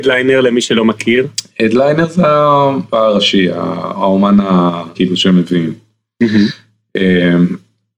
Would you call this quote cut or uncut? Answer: cut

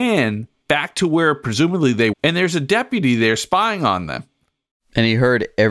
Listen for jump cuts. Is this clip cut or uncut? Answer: cut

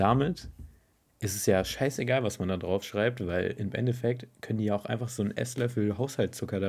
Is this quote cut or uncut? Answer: uncut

